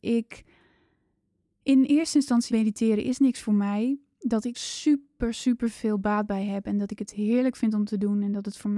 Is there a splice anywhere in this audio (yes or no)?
yes